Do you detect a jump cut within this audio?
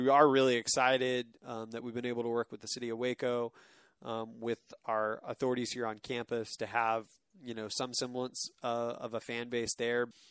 no; 0 cuts

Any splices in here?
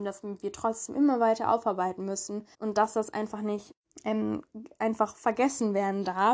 yes; 2 cuts; at 2.5 s, 3.8 s

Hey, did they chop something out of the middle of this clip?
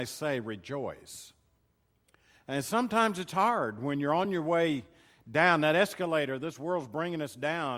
no; 0 cuts

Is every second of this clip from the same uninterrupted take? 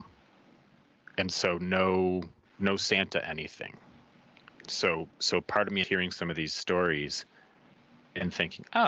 no; 1 cut; at 5.8 s

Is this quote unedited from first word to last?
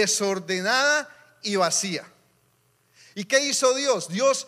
yes; 0 cuts

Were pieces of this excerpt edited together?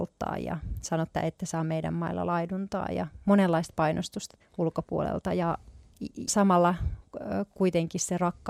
yes; 3 cuts; at 1.1 s, 4.4 s, 6.3 s

